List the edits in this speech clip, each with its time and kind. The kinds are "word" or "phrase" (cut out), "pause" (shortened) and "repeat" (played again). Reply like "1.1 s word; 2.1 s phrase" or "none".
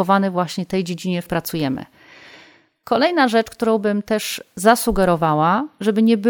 1.3 s word